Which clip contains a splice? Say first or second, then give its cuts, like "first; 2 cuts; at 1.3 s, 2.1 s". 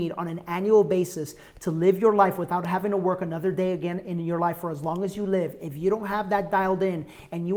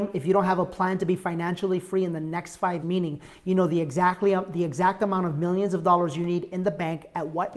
second; 1 cut; at 2.8 s